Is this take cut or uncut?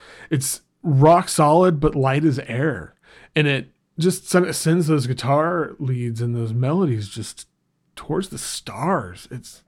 uncut